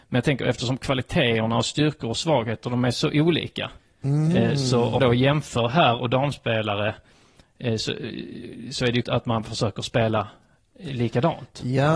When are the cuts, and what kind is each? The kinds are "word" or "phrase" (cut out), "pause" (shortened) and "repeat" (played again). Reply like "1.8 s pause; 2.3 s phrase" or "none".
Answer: 3.8 s pause; 5.0 s word; 9.0 s word

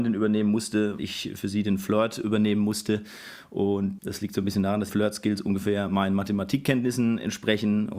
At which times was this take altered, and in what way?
1.0 s word; 4.0 s word; 4.9 s word

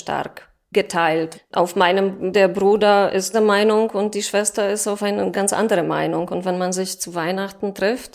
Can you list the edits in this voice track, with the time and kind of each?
1.3 s word; 2.3 s word; 3.3 s word; 5.3 s word

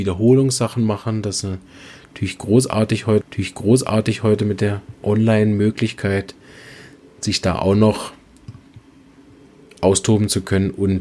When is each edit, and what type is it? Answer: 3.2 s repeat

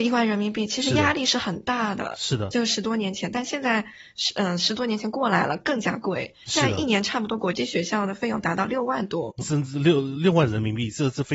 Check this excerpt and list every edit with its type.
9.4 s word

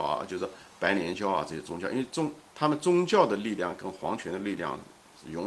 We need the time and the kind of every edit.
2.5 s pause

